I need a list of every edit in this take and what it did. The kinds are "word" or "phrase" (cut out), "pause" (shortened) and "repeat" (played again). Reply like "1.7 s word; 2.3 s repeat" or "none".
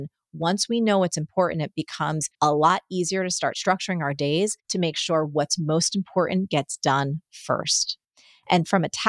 2.3 s pause; 4.6 s pause

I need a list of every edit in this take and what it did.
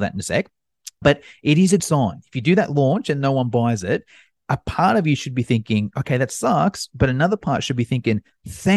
1.0 s word; 1.8 s word

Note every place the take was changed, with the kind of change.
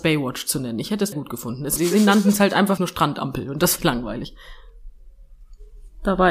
1.1 s word; 1.8 s word; 2.8 s word; 3.8 s word

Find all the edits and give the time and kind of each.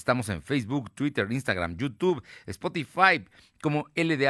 none

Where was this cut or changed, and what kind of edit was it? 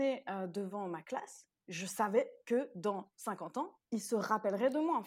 3.8 s pause

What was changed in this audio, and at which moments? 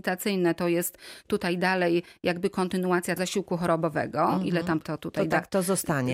3.2 s word; 4.8 s word

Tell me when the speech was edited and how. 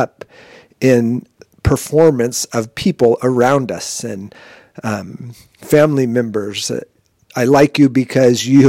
1.4 s pause

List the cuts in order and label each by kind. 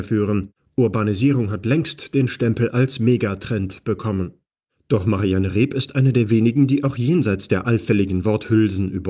none

